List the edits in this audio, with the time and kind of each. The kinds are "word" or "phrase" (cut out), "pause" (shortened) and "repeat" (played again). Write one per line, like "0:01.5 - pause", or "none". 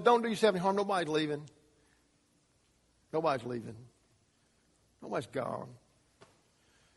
none